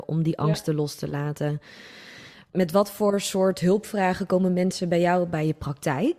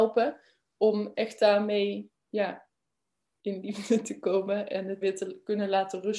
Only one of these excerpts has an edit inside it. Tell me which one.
second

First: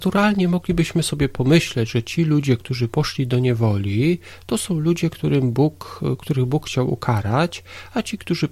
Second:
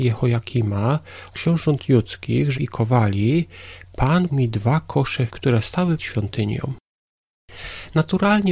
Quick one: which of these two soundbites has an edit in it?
second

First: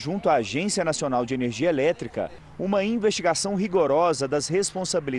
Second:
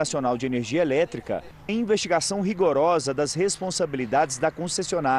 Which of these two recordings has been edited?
second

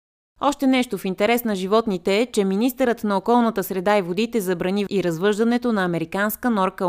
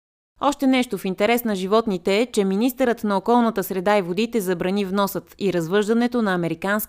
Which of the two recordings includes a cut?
first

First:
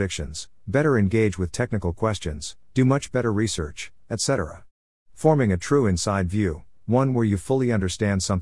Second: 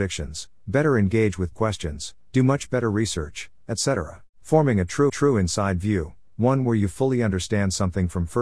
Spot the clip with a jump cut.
second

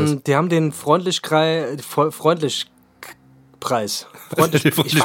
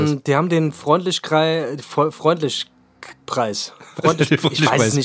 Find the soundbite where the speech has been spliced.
second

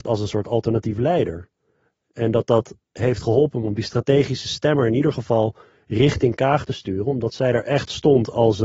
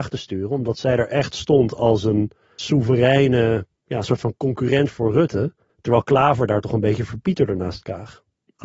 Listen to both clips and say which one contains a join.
second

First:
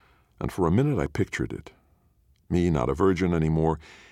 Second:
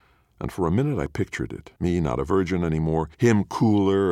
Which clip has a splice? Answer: second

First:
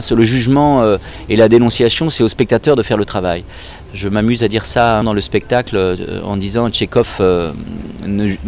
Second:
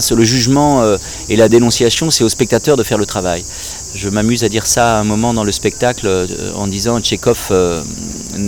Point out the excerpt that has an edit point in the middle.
first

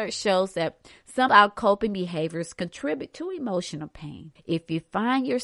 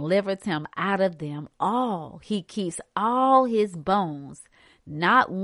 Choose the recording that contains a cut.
first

